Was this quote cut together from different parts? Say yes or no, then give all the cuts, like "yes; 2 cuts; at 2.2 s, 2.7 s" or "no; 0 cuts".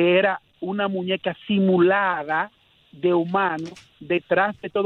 no; 0 cuts